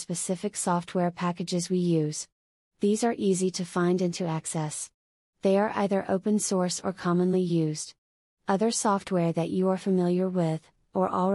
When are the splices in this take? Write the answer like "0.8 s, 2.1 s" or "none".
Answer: none